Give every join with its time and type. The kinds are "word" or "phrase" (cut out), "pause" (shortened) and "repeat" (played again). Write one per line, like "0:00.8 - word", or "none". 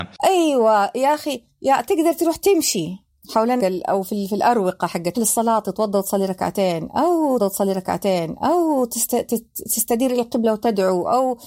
0:03.6 - phrase
0:05.1 - phrase
0:07.4 - repeat